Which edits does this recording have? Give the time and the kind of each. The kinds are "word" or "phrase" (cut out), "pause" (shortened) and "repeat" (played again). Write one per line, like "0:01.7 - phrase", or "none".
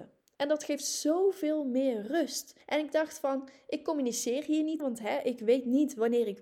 0:02.6 - pause
0:04.8 - word